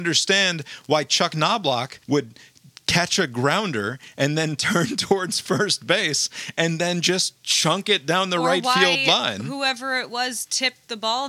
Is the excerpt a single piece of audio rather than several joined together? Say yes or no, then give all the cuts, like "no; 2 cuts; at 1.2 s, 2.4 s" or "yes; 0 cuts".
no; 1 cut; at 2.0 s